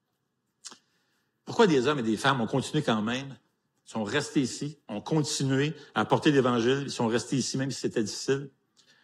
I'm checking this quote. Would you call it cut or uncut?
uncut